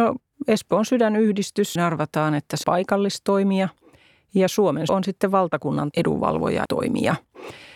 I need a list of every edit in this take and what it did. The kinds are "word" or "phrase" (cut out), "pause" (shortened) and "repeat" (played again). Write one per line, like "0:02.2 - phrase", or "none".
0:01.8 - word
0:02.6 - word
0:04.9 - word
0:05.9 - word
0:06.7 - word